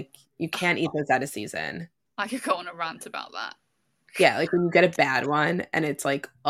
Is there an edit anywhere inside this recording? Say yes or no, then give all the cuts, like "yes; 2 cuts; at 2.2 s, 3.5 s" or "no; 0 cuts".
no; 0 cuts